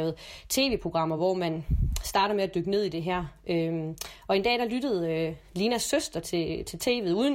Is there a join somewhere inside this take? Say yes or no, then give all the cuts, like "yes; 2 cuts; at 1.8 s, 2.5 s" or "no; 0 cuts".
no; 0 cuts